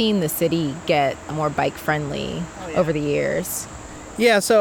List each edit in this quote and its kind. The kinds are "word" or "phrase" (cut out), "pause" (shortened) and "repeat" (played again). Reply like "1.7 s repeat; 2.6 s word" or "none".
1.3 s phrase